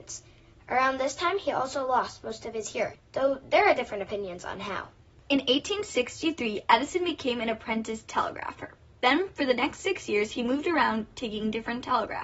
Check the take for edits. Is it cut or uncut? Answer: uncut